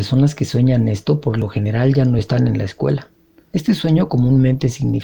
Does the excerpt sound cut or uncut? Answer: uncut